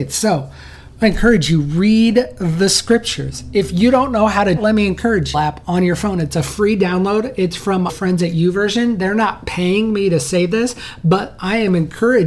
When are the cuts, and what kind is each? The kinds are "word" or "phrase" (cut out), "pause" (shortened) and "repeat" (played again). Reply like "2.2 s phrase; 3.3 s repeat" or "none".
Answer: 1.0 s word; 4.6 s phrase; 5.3 s phrase; 7.9 s word